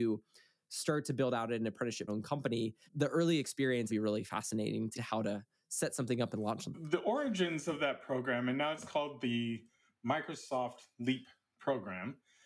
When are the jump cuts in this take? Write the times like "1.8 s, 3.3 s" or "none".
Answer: 2.1 s, 2.9 s, 3.9 s, 4.9 s